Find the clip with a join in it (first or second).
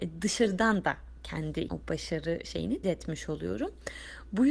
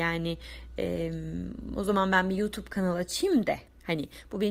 first